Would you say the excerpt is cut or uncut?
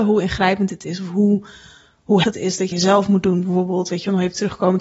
cut